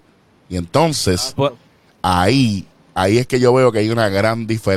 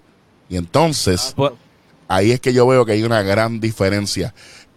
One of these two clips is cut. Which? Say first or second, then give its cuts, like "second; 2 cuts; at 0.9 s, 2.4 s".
second; 1 cut; at 1.9 s